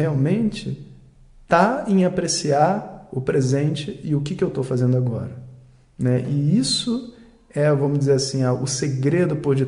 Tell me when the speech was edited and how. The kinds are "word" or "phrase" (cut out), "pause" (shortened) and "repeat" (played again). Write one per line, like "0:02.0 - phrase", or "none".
none